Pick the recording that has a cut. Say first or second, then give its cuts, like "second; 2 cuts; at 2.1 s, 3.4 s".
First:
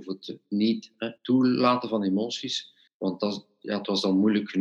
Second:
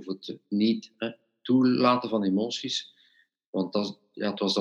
first; 2 cuts; at 1.2 s, 2.9 s